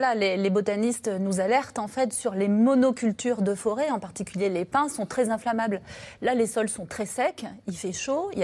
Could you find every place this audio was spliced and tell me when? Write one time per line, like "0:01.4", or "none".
none